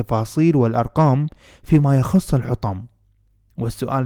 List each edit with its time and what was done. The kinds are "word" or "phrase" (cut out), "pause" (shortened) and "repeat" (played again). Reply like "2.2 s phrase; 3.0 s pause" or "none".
none